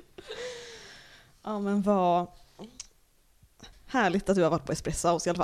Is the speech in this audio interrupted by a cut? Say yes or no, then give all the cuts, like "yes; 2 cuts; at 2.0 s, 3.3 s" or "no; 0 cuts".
no; 0 cuts